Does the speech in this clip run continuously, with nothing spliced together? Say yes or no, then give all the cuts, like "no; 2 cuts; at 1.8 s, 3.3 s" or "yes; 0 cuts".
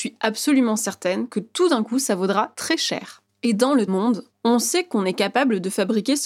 no; 1 cut; at 3.9 s